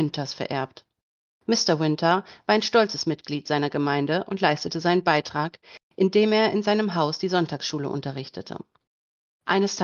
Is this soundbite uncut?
yes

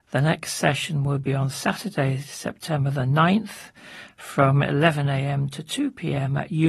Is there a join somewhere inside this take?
no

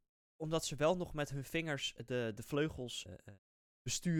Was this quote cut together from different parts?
yes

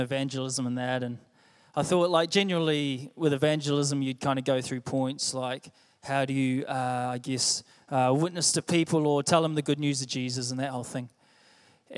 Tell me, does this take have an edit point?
no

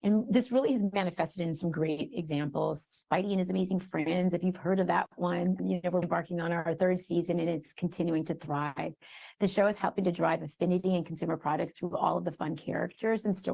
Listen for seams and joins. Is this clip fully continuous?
no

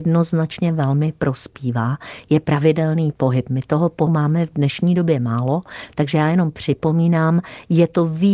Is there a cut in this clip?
yes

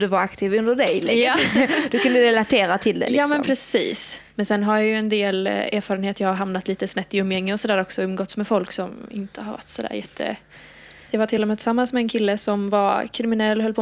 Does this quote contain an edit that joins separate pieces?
no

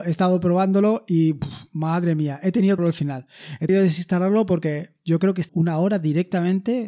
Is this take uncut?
no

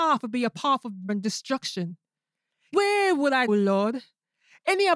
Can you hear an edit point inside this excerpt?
yes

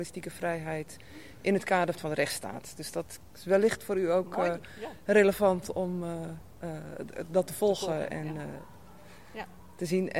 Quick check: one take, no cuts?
no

